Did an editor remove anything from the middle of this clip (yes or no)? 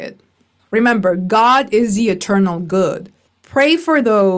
no